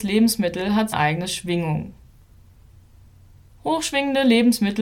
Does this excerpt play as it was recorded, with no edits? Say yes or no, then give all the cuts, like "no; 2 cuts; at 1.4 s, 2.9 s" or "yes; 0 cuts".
no; 1 cut; at 0.9 s